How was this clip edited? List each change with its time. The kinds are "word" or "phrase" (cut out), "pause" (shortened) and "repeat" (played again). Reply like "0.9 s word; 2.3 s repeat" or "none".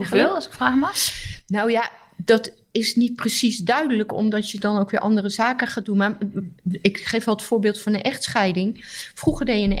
4.6 s word